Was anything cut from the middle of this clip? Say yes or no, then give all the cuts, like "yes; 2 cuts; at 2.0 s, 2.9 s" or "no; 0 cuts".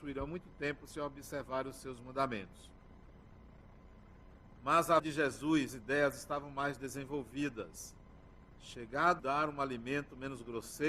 yes; 3 cuts; at 5.0 s, 5.7 s, 9.2 s